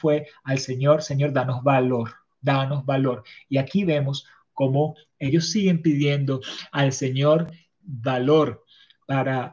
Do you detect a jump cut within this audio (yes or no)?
yes